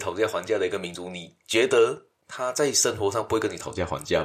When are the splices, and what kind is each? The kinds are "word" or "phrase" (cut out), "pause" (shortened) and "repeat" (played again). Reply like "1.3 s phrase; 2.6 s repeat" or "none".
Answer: 2.2 s pause